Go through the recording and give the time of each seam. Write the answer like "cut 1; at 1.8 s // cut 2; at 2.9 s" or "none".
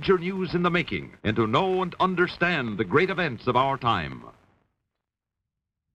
cut 1; at 1.2 s